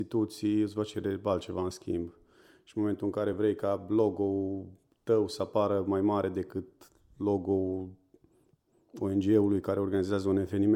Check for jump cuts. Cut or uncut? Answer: uncut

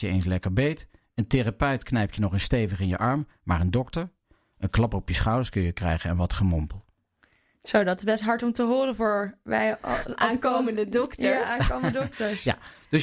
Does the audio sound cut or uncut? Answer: uncut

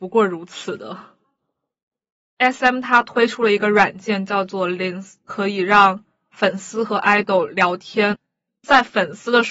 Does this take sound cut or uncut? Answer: uncut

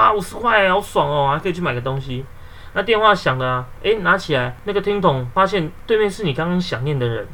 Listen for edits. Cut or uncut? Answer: uncut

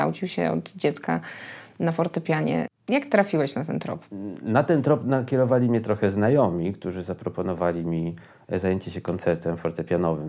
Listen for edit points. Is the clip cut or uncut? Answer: uncut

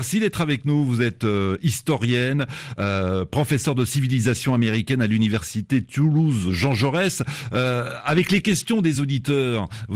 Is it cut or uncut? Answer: uncut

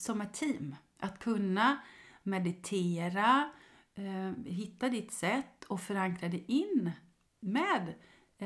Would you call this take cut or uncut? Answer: uncut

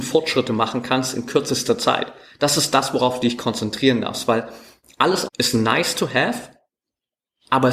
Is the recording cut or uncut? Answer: cut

